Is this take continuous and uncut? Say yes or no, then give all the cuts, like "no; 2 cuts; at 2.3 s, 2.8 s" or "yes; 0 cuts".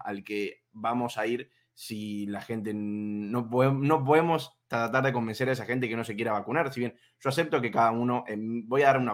yes; 0 cuts